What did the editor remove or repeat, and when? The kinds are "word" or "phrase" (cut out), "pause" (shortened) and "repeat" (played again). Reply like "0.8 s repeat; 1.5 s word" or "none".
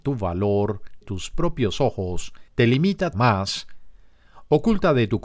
1.0 s word; 2.5 s pause; 3.1 s word